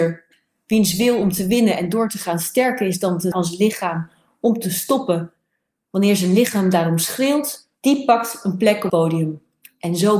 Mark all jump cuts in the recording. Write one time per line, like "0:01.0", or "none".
0:03.3
0:07.7
0:08.9